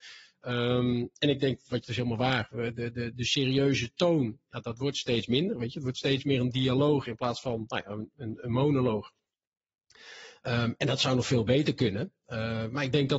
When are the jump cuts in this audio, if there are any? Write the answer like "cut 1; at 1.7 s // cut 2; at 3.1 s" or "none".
cut 1; at 1.8 s // cut 2; at 3.1 s // cut 3; at 8.4 s